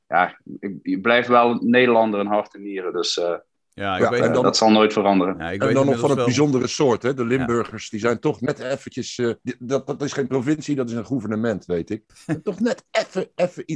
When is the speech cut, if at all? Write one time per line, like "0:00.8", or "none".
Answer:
0:09.4
0:12.1